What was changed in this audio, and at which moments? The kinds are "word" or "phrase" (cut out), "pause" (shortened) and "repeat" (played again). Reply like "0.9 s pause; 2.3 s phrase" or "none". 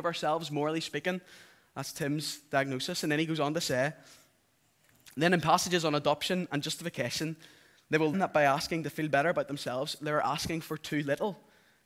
8.1 s word

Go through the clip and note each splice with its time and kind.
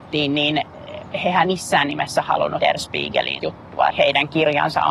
1.4 s word; 2.6 s word; 3.4 s word; 3.9 s word

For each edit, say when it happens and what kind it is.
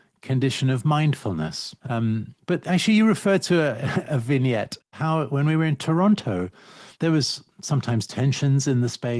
1.8 s pause; 6.9 s pause

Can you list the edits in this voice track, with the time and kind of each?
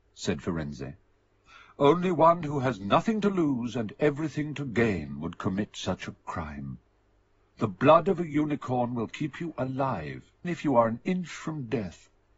10.4 s word

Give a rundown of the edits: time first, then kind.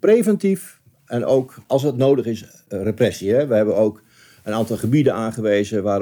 none

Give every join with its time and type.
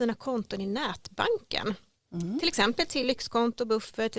none

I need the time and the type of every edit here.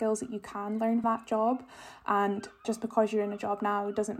1.0 s word; 2.6 s word

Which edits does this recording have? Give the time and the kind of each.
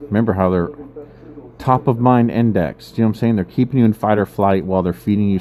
none

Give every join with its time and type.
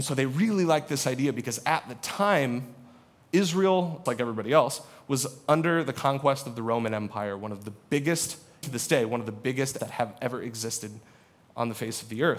4.1 s word; 8.6 s word; 9.8 s word

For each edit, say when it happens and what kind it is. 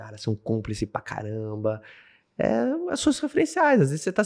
none

